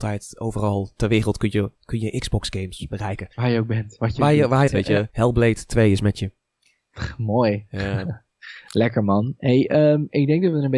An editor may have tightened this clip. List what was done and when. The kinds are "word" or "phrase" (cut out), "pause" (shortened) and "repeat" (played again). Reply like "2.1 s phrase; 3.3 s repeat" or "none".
1.7 s pause; 3.3 s pause; 4.7 s phrase; 5.1 s pause